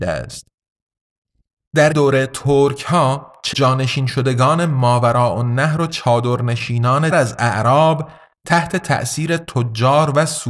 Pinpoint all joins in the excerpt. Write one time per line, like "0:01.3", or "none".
0:01.9
0:03.5
0:05.9
0:07.1